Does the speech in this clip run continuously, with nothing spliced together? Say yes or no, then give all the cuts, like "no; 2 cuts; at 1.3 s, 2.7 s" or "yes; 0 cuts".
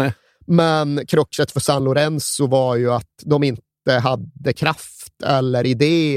yes; 0 cuts